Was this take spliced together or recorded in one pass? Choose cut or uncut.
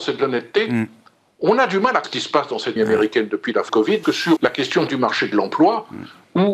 cut